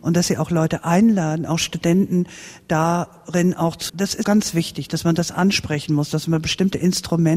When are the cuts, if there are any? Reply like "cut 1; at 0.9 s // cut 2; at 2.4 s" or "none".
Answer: cut 1; at 3.9 s // cut 2; at 4.2 s